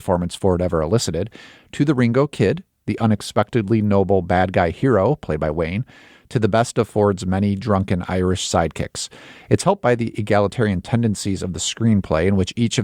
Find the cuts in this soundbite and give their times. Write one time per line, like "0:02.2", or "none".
none